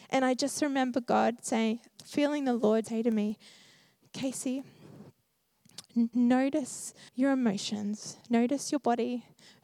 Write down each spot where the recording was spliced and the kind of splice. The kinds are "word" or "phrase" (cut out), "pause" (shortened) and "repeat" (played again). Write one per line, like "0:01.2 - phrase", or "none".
0:01.9 - word
0:02.8 - word
0:06.1 - word
0:07.1 - pause
0:08.2 - pause

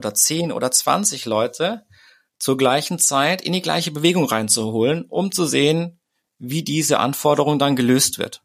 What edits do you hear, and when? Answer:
none

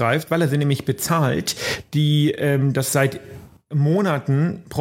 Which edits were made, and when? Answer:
none

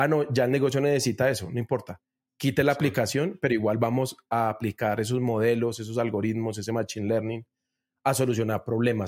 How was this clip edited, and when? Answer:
none

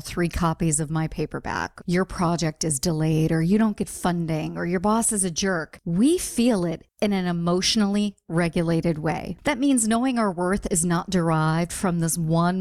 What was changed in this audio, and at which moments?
none

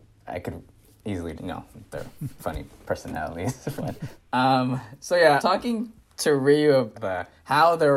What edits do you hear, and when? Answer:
0:01.4 - word
0:02.4 - word
0:03.8 - word
0:05.4 - word
0:06.9 - word

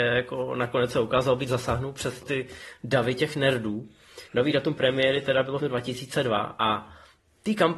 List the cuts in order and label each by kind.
0:01.5 - phrase
0:02.2 - word
0:04.3 - pause
0:05.6 - phrase

